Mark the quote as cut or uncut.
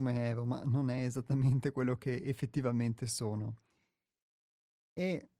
uncut